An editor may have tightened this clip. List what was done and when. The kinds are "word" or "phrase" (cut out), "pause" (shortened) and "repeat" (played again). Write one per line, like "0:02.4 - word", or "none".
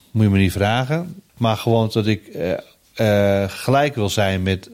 none